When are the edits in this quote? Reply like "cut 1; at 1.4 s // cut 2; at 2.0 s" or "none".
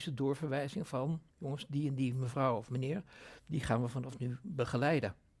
cut 1; at 1.3 s